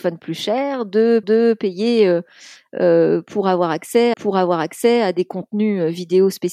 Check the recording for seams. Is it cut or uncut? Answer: cut